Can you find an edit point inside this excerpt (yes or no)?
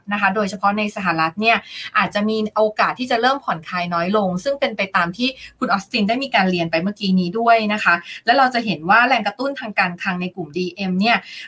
no